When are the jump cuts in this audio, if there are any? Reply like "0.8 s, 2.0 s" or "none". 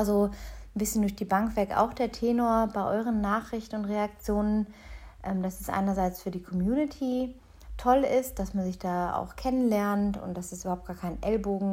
none